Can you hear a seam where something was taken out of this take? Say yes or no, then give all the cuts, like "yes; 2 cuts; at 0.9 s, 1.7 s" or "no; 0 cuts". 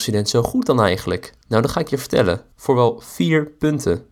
yes; 2 cuts; at 1.4 s, 2.5 s